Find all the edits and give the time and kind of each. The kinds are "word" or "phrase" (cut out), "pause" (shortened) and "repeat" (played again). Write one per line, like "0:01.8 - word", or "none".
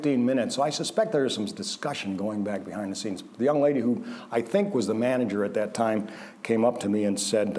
none